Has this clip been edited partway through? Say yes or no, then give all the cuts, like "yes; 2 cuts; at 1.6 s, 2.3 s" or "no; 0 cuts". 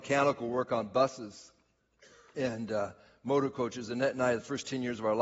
no; 0 cuts